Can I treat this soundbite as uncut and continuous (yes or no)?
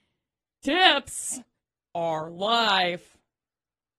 yes